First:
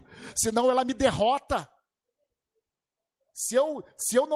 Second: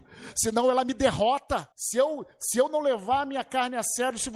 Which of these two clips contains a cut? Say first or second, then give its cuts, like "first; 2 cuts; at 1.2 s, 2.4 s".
second; 1 cut; at 1.7 s